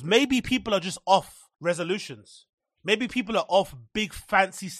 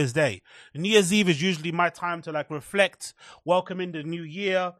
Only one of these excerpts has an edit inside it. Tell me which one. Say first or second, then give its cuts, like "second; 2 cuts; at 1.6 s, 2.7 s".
first; 1 cut; at 1.5 s